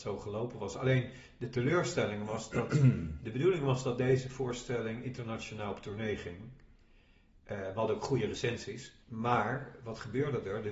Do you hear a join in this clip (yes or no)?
yes